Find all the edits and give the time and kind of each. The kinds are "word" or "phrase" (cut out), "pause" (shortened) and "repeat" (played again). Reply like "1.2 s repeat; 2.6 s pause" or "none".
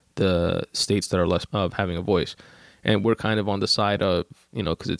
1.5 s phrase